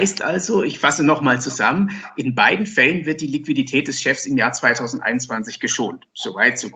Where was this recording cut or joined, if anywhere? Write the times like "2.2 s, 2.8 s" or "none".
none